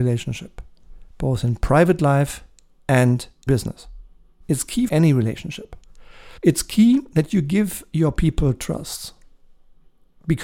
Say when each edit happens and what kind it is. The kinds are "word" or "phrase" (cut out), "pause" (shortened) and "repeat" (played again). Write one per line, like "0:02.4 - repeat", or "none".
0:01.1 - pause
0:03.5 - word
0:04.9 - word
0:06.4 - pause